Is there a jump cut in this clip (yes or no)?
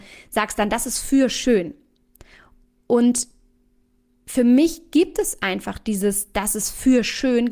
no